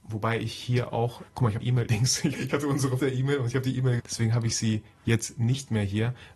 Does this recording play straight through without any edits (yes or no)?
no